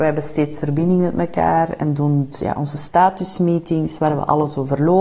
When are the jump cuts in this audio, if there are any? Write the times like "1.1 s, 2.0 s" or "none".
2.3 s